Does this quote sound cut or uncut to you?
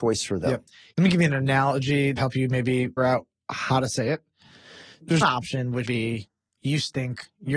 cut